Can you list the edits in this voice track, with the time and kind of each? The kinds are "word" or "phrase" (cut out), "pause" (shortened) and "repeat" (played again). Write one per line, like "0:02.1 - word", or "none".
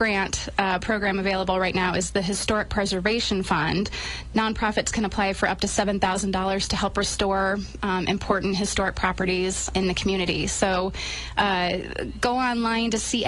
0:09.7 - word